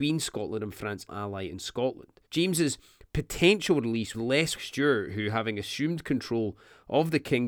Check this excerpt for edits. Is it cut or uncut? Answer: cut